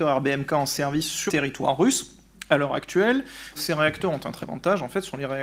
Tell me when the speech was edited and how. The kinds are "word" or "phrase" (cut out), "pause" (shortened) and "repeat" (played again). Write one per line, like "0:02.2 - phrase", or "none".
0:01.3 - word
0:03.6 - word
0:04.4 - word